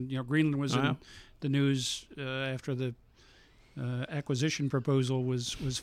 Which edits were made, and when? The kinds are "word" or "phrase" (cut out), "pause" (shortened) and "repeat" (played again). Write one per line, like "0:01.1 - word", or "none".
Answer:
none